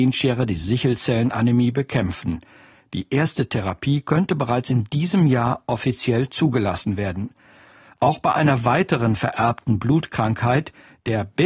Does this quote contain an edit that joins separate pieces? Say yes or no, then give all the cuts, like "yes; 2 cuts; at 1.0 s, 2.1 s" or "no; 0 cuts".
no; 0 cuts